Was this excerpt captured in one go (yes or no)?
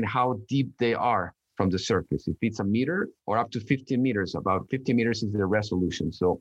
no